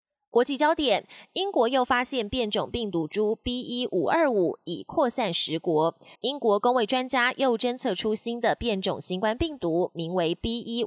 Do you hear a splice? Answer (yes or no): yes